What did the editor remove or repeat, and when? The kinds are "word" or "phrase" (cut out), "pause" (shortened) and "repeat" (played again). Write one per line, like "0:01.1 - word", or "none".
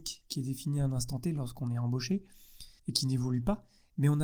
0:02.8 - pause